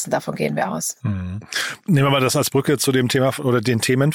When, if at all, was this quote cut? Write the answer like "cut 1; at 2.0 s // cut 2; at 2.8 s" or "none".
cut 1; at 1.8 s